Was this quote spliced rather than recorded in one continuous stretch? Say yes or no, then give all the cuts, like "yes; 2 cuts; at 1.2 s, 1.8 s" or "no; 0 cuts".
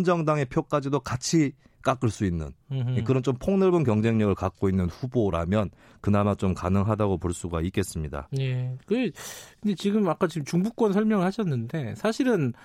no; 0 cuts